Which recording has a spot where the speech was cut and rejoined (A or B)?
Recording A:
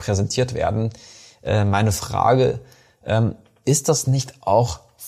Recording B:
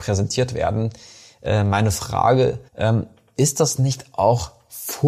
B